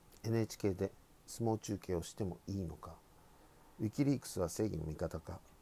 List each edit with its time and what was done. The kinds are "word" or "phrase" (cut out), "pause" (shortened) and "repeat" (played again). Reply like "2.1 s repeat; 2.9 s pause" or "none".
none